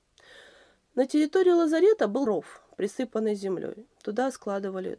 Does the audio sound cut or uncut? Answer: cut